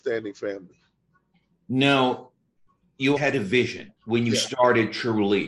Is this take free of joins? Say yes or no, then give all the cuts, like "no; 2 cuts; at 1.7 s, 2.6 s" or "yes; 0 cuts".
no; 2 cuts; at 3.2 s, 4.0 s